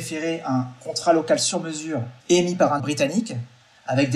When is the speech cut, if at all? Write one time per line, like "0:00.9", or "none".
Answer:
0:02.2
0:02.8